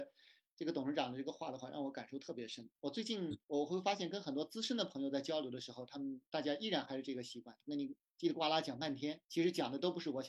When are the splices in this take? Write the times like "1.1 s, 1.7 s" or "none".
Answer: 3.4 s, 6.3 s, 9.2 s